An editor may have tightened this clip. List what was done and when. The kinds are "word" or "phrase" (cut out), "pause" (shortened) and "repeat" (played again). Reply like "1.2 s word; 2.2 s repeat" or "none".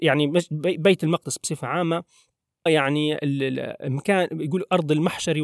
2.7 s word